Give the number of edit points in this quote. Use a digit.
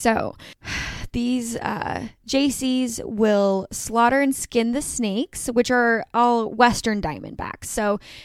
0